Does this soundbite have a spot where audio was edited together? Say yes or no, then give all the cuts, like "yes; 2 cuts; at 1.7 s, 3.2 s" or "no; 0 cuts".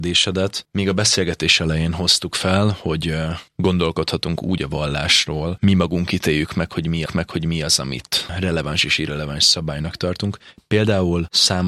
yes; 2 cuts; at 5.6 s, 7.1 s